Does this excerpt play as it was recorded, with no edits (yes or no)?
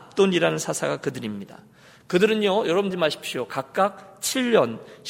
no